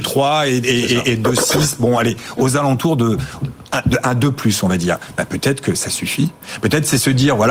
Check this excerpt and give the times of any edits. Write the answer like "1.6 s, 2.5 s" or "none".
none

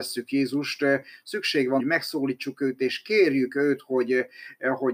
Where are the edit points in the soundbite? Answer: 1.8 s

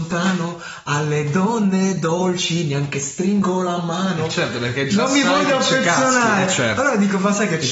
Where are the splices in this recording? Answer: none

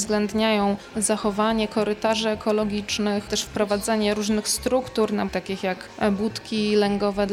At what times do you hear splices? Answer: 3.3 s, 5.3 s

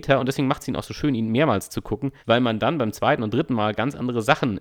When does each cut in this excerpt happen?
2.2 s

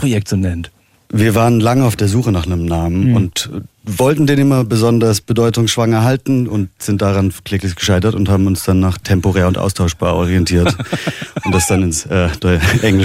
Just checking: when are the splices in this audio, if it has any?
none

